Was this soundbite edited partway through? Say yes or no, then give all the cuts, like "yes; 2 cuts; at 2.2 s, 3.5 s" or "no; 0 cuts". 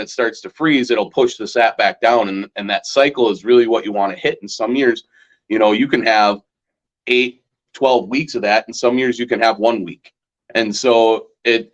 no; 0 cuts